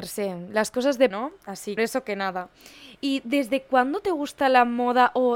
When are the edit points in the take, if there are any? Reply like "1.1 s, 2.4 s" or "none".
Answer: 1.1 s, 1.8 s